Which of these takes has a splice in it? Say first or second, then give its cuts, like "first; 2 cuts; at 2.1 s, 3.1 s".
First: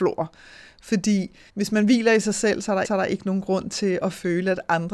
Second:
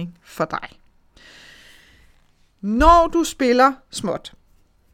first; 2 cuts; at 1.5 s, 2.8 s